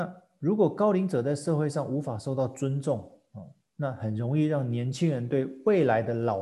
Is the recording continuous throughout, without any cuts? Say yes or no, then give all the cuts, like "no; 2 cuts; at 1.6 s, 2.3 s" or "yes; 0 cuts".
yes; 0 cuts